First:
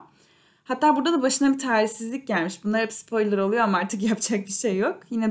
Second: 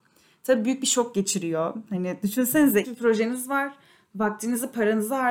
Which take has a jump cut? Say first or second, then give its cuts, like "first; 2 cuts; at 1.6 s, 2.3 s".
second; 1 cut; at 2.8 s